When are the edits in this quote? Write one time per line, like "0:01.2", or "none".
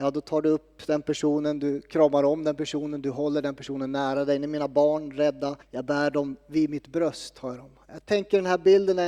0:05.6

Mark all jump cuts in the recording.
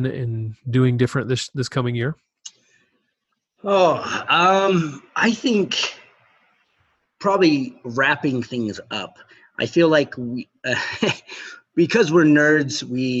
none

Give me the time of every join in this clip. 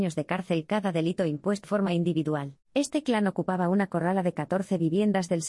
0:01.6
0:02.6

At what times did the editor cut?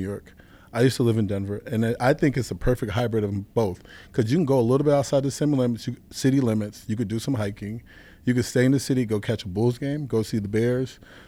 none

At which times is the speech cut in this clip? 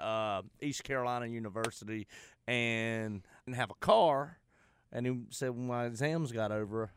0:03.5

